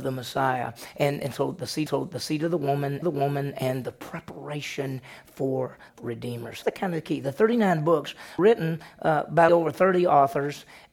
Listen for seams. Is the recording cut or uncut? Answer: cut